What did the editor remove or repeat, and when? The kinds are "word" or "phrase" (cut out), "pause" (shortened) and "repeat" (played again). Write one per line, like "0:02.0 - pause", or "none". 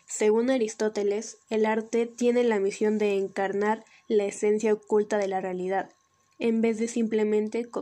none